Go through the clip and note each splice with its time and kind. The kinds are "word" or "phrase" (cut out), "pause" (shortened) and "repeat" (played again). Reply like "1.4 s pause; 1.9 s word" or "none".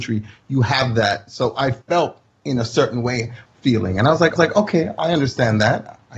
1.8 s pause; 3.5 s phrase; 4.4 s repeat